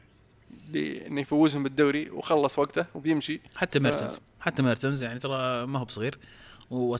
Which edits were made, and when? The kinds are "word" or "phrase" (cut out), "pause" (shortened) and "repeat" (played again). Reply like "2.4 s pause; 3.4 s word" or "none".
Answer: 3.5 s pause

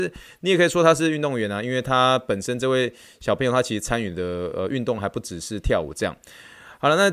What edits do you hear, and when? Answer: none

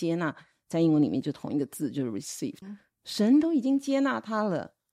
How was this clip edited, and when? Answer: 2.6 s word

